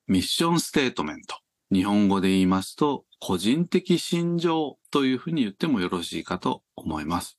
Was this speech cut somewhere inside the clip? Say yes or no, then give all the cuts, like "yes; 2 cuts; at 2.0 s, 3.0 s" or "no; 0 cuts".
yes; 2 cuts; at 1.5 s, 4.8 s